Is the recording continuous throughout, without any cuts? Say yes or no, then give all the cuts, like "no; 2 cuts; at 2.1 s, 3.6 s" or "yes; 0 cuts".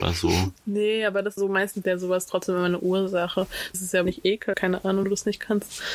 no; 6 cuts; at 1.4 s, 1.8 s, 3.7 s, 4.1 s, 4.5 s, 5.0 s